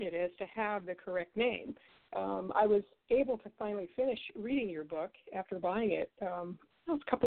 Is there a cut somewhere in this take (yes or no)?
no